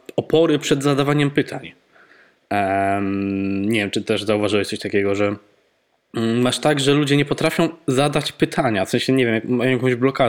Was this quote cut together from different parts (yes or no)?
no